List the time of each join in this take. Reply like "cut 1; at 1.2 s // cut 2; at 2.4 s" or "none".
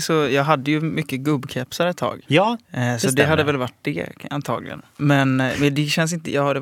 cut 1; at 2.2 s